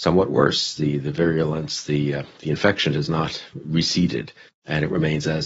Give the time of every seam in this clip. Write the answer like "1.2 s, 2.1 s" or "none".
4.5 s